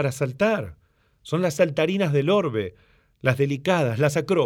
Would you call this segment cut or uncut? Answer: uncut